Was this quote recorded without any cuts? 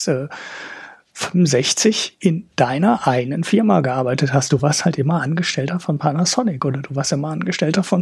yes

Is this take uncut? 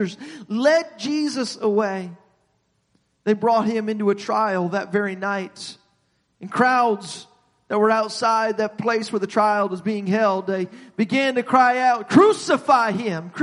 yes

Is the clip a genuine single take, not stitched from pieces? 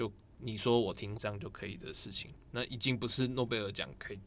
no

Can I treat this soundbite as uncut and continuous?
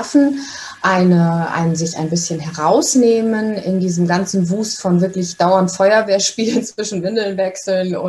yes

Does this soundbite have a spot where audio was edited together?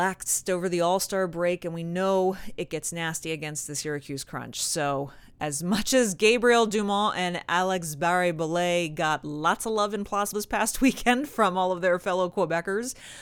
yes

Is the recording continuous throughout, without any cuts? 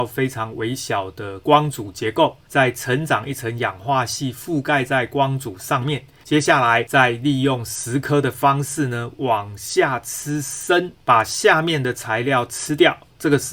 yes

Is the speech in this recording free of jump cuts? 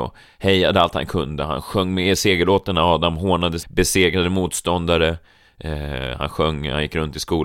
no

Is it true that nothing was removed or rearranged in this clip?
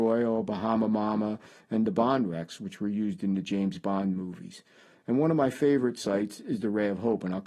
yes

